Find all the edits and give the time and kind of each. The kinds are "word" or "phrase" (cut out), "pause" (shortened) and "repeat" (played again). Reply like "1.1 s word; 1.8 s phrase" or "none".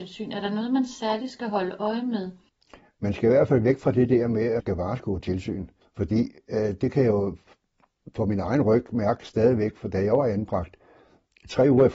2.5 s pause; 4.6 s word; 5.8 s pause